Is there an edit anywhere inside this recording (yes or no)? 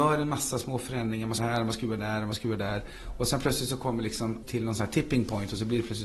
yes